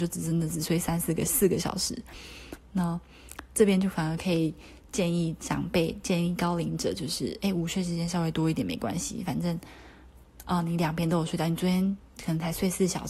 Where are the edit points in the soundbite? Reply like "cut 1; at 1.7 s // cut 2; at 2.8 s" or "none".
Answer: none